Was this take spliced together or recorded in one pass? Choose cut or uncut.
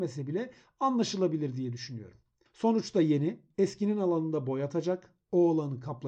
uncut